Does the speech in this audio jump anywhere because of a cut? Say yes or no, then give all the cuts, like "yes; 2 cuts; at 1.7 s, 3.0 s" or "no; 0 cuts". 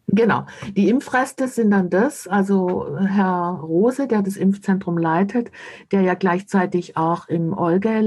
no; 0 cuts